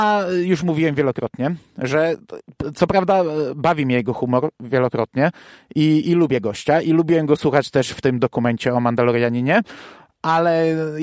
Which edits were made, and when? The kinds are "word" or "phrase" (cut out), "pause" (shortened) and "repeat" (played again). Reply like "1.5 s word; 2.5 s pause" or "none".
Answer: none